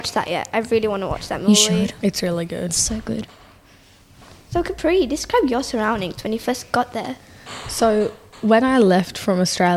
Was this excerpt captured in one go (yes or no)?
yes